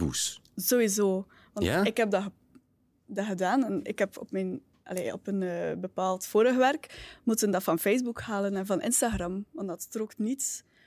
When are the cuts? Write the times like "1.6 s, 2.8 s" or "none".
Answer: none